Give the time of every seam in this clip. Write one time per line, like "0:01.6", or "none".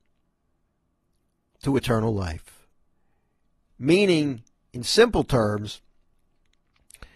none